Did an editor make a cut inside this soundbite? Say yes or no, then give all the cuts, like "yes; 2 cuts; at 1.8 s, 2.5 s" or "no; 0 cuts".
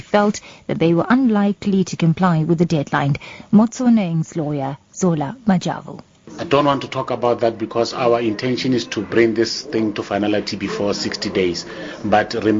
no; 0 cuts